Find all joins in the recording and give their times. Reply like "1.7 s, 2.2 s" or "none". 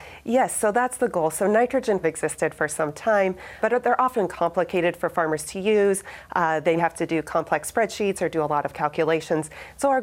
2.0 s, 3.6 s, 6.8 s